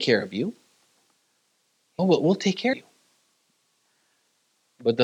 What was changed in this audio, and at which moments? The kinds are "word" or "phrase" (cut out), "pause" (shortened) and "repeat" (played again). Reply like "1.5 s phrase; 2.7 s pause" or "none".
2.0 s word; 2.7 s word